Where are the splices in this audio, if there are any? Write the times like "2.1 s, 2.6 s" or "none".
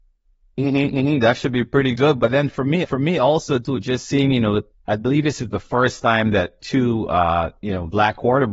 2.8 s